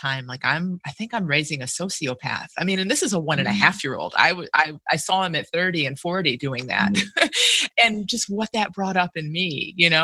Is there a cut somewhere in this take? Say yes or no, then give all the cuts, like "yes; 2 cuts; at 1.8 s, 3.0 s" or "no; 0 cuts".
no; 0 cuts